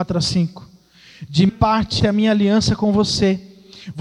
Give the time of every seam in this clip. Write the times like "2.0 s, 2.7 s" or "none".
1.5 s, 2.0 s